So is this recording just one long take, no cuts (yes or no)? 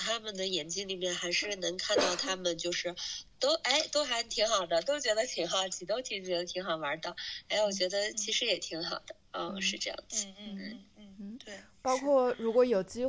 no